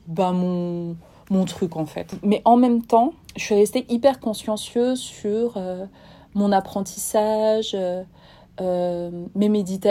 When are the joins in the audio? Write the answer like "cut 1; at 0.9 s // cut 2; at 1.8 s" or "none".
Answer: none